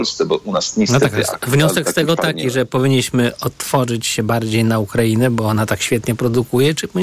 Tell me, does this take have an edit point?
no; 0 cuts

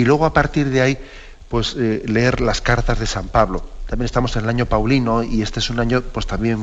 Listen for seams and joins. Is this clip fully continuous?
yes; 0 cuts

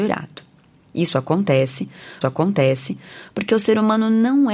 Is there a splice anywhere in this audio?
yes; 1 cut; at 2.2 s

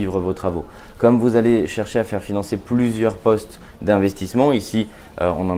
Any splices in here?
no; 0 cuts

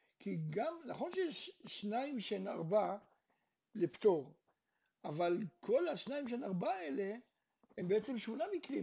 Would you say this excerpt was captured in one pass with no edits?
yes; 0 cuts

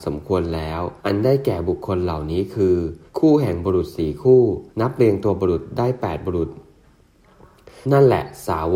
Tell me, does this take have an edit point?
yes; 4 cuts; at 1.0 s, 3.1 s, 4.7 s, 7.8 s

